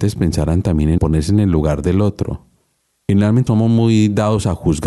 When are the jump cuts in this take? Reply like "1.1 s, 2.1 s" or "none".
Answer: 1.0 s, 3.5 s